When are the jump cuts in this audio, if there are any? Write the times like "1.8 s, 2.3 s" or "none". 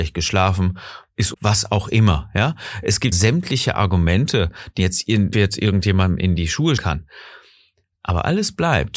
1.3 s, 3.1 s, 4.8 s, 5.3 s, 6.8 s